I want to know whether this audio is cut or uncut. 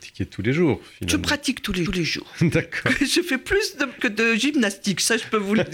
cut